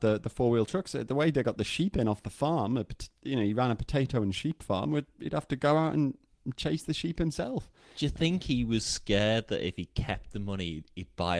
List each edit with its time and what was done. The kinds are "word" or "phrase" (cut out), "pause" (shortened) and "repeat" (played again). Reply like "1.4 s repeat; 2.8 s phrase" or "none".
none